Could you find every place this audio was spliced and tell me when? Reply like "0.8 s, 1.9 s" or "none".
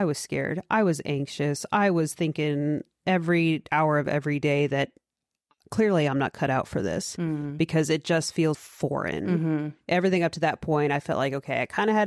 8.5 s